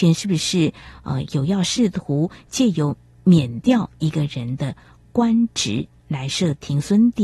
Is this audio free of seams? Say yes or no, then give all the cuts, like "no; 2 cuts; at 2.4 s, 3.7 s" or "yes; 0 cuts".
yes; 0 cuts